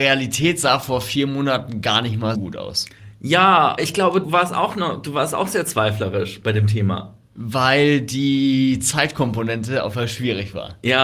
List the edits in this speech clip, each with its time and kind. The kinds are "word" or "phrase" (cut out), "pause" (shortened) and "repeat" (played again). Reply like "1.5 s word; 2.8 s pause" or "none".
2.3 s word; 3.8 s word; 4.2 s word; 9.9 s word